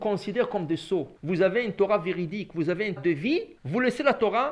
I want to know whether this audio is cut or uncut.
cut